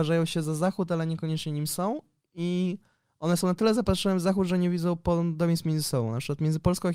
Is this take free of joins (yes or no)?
yes